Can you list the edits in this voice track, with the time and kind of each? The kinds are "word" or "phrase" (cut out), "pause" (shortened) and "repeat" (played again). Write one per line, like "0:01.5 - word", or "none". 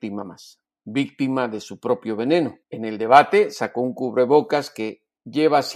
0:02.6 - pause